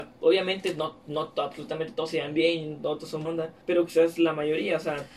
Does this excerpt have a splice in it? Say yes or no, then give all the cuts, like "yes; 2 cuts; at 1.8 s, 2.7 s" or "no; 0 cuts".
yes; 2 cuts; at 3.2 s, 3.6 s